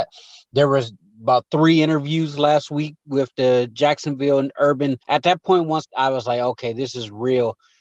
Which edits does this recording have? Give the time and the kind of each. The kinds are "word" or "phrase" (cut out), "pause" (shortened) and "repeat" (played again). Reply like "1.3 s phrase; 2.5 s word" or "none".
5.0 s pause; 5.8 s phrase